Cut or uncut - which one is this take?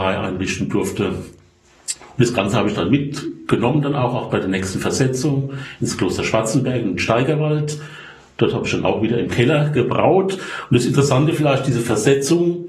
uncut